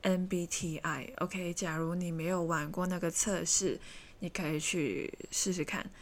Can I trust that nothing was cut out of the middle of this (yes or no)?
yes